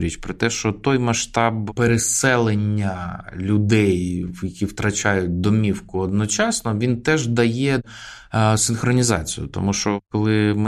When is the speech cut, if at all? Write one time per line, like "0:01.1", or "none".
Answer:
none